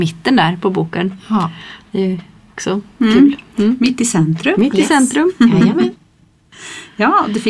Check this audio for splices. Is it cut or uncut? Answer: uncut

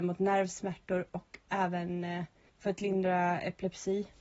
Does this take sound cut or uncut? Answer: uncut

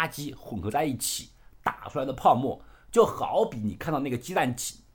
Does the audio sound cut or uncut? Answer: uncut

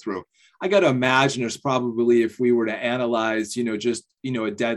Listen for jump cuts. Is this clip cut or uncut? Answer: uncut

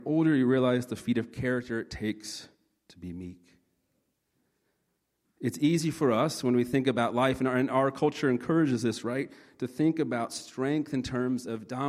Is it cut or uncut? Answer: uncut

